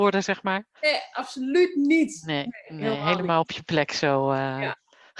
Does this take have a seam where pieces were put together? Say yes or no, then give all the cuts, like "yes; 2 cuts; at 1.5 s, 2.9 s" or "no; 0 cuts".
no; 0 cuts